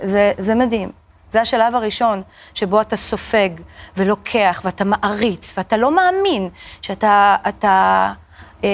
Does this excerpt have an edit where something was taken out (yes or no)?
no